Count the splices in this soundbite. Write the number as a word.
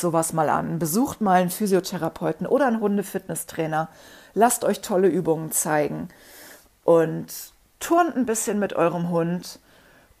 zero